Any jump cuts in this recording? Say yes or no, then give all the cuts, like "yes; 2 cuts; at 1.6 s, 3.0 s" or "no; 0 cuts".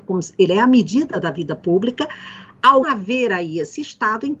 yes; 1 cut; at 2.8 s